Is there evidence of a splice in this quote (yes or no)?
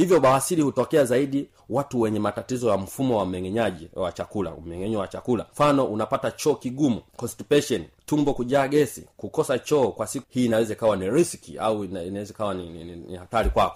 yes